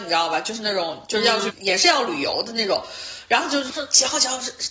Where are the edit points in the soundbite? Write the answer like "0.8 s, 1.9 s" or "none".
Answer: 1.5 s, 3.7 s